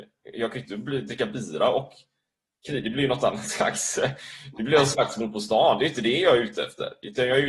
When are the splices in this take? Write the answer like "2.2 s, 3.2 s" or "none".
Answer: none